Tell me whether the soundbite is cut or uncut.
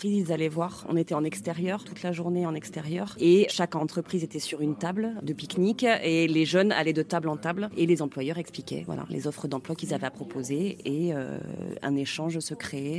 cut